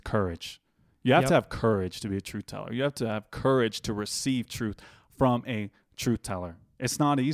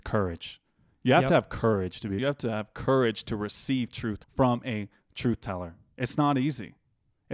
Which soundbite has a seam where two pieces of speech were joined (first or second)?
second